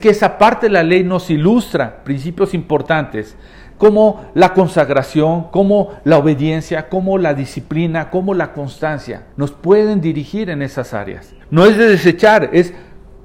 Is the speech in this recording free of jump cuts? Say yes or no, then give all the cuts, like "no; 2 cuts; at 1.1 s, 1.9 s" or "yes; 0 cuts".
no; 2 cuts; at 9.3 s, 11.4 s